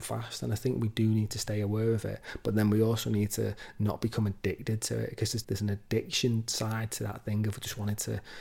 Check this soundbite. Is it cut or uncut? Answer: cut